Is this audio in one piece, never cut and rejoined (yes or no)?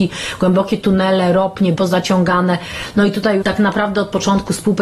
no